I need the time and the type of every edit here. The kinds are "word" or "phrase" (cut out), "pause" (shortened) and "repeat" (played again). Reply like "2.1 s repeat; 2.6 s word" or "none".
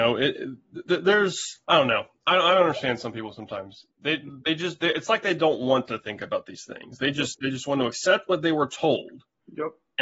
1.6 s pause; 3.9 s pause